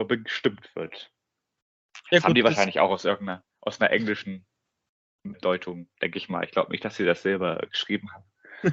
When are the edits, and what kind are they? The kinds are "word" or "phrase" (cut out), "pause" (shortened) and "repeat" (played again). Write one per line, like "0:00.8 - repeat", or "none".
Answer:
0:05.3 - word